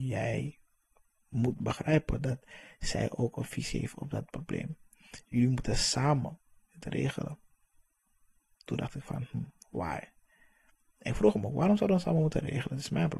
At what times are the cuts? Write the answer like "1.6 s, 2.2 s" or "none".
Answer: none